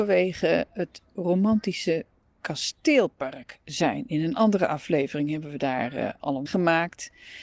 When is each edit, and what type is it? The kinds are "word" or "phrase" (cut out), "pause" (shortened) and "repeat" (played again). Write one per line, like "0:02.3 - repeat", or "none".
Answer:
0:06.5 - word

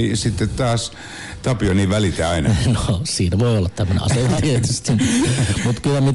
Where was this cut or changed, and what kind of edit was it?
0:04.4 - word

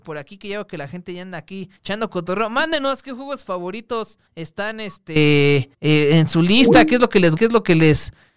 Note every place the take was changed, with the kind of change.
0:01.8 - pause
0:04.3 - pause
0:05.7 - pause
0:07.4 - word

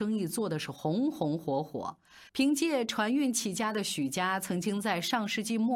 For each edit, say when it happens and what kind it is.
0:02.3 - pause

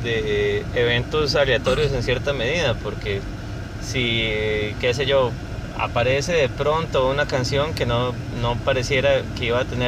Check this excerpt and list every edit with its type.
none

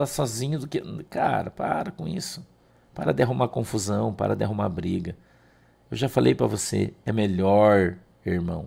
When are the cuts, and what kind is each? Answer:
none

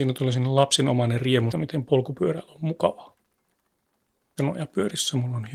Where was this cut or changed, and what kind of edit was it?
0:01.5 - word
0:04.4 - word

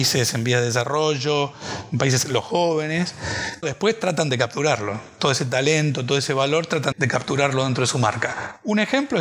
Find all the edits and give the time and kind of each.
0:02.2 - word
0:03.6 - word
0:06.9 - word

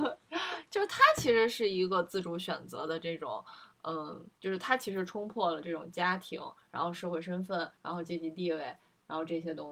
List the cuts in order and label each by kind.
0:07.7 - pause

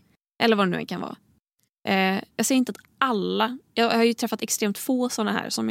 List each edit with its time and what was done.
none

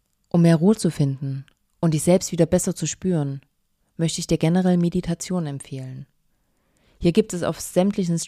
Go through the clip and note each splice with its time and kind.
none

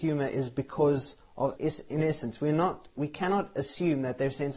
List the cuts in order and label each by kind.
0:01.5 - word

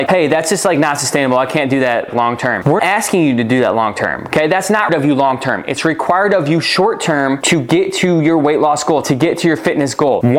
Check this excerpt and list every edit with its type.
0:02.1 - word
0:02.8 - word
0:04.9 - word

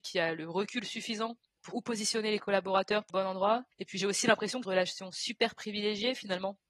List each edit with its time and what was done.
0:01.7 - word
0:03.1 - phrase
0:03.7 - pause
0:04.6 - phrase

